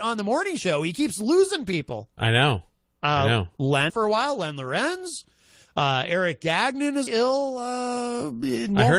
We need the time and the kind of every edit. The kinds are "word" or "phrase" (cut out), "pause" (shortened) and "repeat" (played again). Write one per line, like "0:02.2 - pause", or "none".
0:03.9 - phrase
0:07.1 - word

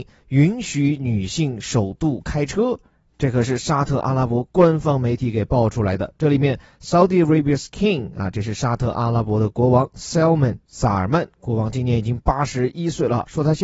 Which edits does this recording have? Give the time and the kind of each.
none

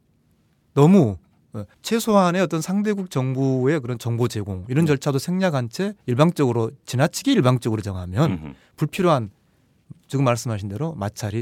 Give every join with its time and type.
0:01.7 - pause
0:06.0 - pause

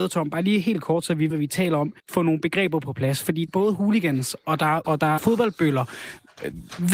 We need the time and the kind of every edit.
0:01.3 - word
0:02.0 - pause
0:03.5 - word
0:04.8 - word
0:05.2 - word

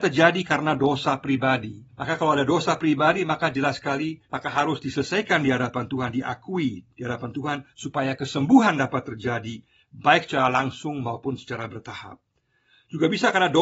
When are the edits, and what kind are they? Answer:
0:01.9 - pause
0:04.2 - pause
0:07.7 - pause

